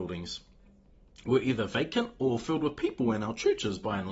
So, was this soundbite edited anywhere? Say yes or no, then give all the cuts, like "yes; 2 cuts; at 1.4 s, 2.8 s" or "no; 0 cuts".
no; 0 cuts